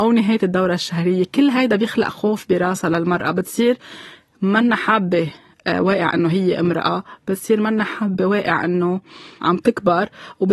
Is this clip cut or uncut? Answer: uncut